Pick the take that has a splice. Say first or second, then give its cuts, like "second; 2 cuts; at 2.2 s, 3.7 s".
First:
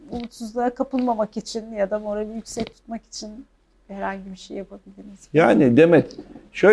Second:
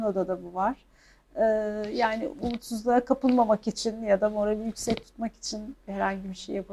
second; 2 cuts; at 2.3 s, 5.7 s